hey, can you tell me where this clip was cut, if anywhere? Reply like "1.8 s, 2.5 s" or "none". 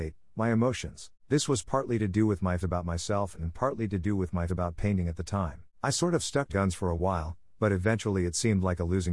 1.2 s, 2.6 s, 4.5 s, 5.7 s, 6.5 s

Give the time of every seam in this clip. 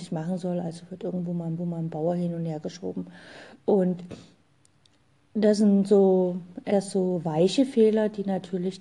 1.6 s, 6.7 s

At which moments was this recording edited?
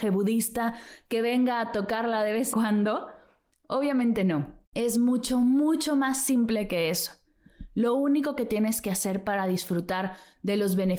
2.5 s, 4.6 s

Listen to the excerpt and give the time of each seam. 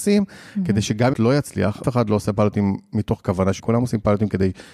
1.1 s, 1.8 s, 3.6 s

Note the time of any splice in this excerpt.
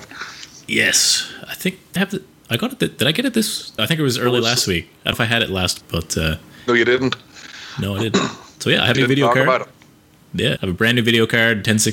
2.0 s, 3.8 s, 5.1 s, 5.8 s, 8.9 s, 10.6 s

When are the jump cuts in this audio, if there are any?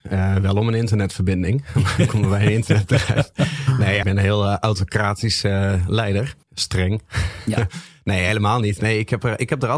4.0 s, 6.4 s

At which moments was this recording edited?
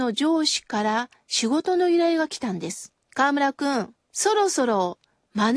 3.0 s, 4.0 s

